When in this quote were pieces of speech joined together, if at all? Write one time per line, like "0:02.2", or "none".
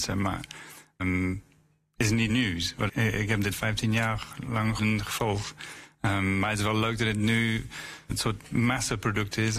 0:01.0
0:02.3
0:02.9
0:03.5
0:04.8
0:08.1